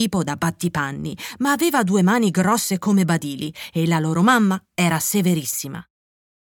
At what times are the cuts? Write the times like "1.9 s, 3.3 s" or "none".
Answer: none